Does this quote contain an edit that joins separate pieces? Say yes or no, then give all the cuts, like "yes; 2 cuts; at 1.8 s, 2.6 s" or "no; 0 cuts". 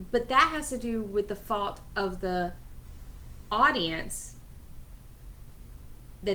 no; 0 cuts